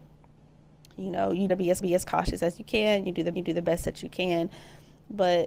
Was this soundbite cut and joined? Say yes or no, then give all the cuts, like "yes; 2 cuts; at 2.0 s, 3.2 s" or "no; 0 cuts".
yes; 3 cuts; at 1.5 s, 1.8 s, 3.3 s